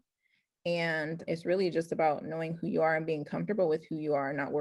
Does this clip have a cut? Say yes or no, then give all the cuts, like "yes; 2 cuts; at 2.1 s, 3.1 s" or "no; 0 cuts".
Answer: yes; 1 cut; at 1.3 s